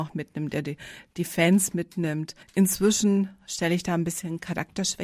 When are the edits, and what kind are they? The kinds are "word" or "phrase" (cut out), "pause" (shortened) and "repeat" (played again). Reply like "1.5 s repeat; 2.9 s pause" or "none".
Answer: 2.4 s pause